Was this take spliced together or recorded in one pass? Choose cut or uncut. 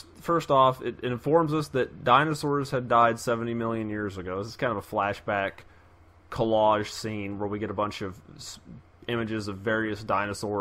uncut